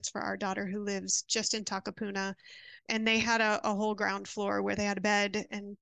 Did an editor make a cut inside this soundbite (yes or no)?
yes